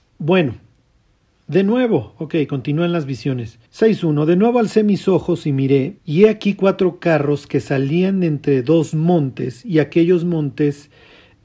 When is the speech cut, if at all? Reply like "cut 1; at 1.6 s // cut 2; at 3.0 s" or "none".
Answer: cut 1; at 3.7 s // cut 2; at 6.0 s